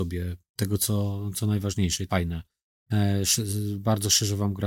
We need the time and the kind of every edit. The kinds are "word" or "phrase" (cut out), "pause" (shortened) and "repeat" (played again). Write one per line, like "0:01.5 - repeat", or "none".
0:02.1 - word